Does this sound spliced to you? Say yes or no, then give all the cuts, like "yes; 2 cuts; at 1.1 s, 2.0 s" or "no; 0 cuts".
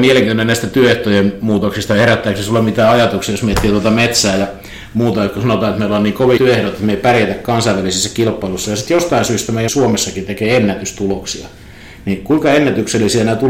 yes; 2 cuts; at 6.4 s, 9.7 s